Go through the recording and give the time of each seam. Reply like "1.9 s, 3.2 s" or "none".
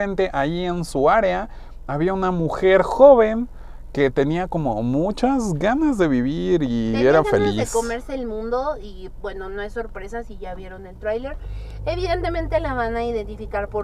none